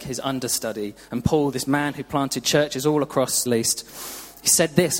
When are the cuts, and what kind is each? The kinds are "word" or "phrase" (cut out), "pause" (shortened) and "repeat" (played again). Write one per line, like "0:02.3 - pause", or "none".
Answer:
0:03.5 - word